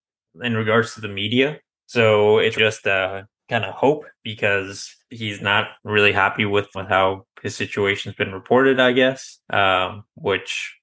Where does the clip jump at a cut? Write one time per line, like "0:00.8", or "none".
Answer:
0:01.7
0:02.5
0:04.1
0:05.8
0:06.7
0:09.4